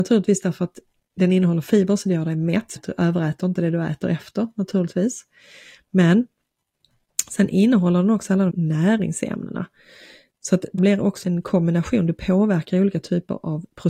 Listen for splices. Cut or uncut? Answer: cut